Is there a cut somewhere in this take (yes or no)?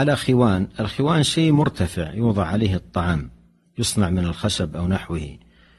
no